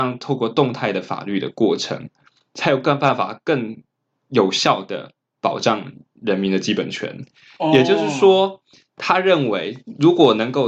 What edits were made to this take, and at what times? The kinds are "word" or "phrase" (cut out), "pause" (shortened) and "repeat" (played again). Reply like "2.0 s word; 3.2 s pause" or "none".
none